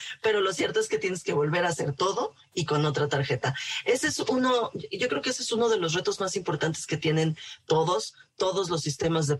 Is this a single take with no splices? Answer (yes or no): yes